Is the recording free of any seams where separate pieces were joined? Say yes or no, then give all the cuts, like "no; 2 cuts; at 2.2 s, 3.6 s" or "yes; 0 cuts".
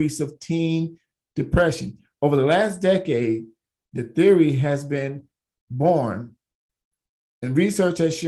yes; 0 cuts